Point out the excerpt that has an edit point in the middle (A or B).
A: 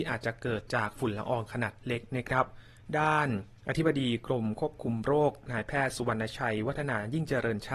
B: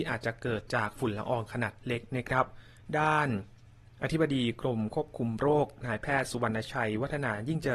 A